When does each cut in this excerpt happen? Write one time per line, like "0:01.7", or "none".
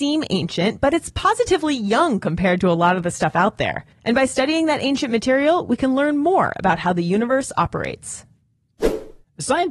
0:03.9